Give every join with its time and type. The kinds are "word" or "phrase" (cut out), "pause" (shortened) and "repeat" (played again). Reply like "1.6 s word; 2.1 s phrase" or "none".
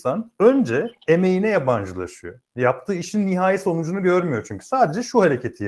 2.5 s pause

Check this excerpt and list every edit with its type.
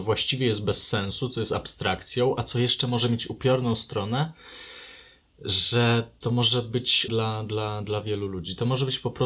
6.2 s phrase; 7.1 s word

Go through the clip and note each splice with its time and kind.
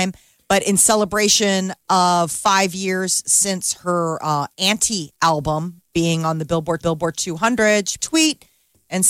6.8 s repeat; 8.0 s phrase

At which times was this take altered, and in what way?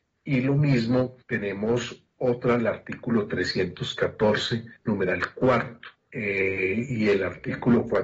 1.2 s pause; 2.6 s phrase; 4.8 s pause; 6.0 s pause

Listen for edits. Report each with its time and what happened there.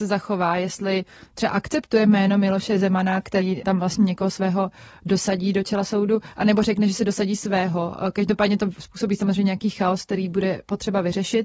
none

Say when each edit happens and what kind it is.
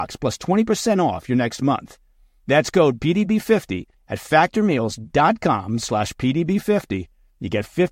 none

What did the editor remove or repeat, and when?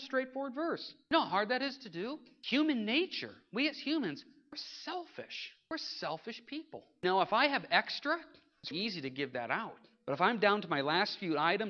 8.7 s word

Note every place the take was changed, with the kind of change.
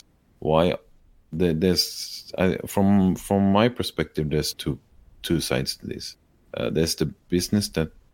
4.5 s word

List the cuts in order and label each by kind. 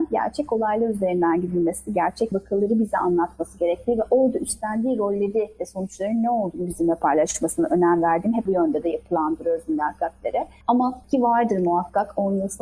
2.3 s word; 8.5 s phrase; 11.0 s word

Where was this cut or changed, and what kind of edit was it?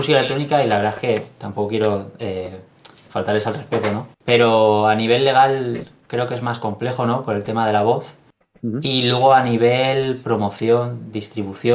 4.1 s pause

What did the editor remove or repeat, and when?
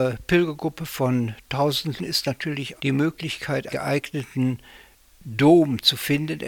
2.0 s word; 2.8 s word; 3.7 s word

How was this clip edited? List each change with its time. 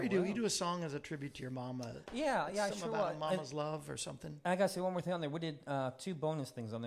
none

